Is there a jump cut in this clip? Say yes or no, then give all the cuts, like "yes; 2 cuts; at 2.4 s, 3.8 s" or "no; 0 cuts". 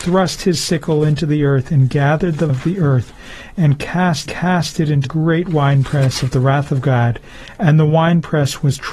yes; 3 cuts; at 2.5 s, 4.3 s, 5.0 s